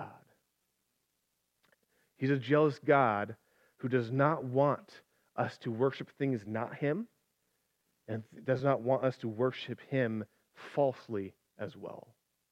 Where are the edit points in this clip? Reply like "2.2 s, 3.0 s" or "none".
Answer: none